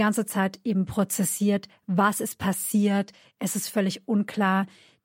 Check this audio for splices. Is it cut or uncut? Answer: uncut